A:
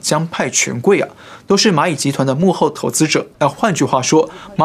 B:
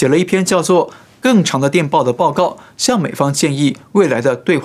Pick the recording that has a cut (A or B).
A